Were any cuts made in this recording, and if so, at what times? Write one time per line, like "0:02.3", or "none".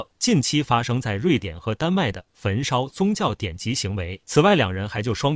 0:04.2